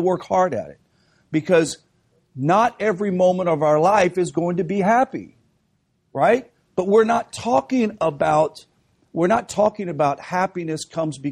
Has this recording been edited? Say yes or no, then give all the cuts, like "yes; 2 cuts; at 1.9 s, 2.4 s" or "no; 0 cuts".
no; 0 cuts